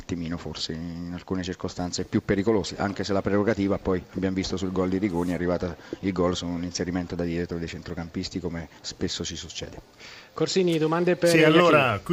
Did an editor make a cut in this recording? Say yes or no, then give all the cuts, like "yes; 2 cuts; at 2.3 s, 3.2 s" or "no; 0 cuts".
yes; 1 cut; at 8.8 s